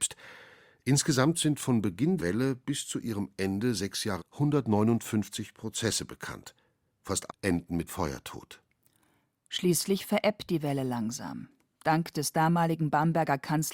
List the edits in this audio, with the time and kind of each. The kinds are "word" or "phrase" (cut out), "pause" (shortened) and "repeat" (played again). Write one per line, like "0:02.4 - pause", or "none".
0:02.2 - word
0:04.2 - word
0:07.3 - word
0:07.9 - word